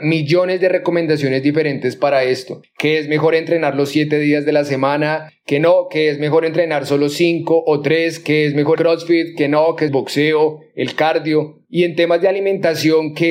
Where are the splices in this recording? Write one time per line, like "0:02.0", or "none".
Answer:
0:08.8
0:09.9